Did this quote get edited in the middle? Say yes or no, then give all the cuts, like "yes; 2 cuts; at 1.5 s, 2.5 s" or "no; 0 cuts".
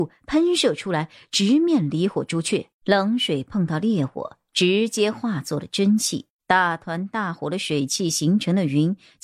yes; 2 cuts; at 2.7 s, 6.3 s